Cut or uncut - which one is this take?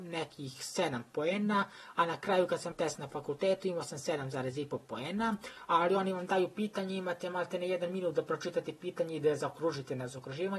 cut